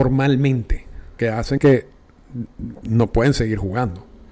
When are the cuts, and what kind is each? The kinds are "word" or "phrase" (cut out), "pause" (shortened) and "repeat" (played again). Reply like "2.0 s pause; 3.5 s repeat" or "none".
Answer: 1.2 s word; 1.6 s word